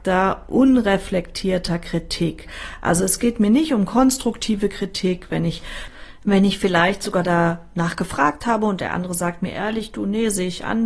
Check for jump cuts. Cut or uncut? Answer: uncut